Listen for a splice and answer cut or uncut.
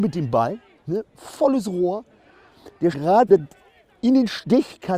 cut